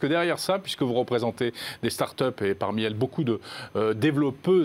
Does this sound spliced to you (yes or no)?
no